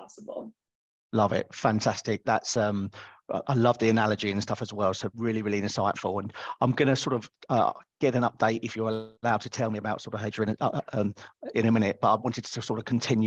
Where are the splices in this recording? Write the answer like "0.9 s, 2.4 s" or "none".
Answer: 9.2 s